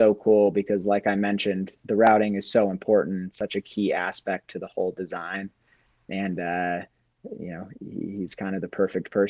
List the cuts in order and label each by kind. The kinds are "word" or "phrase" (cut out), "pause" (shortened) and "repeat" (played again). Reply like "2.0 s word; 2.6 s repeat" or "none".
none